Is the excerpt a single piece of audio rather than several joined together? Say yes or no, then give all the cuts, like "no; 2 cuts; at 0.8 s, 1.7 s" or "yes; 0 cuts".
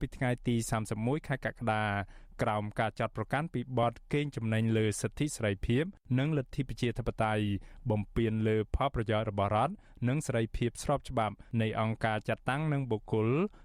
yes; 0 cuts